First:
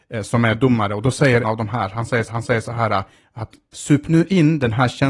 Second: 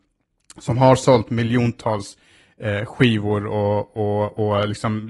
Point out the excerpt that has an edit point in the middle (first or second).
first